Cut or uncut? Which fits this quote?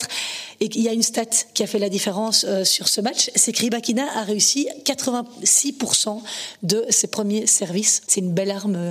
uncut